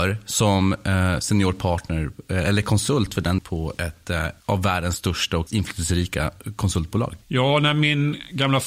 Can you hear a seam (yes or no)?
yes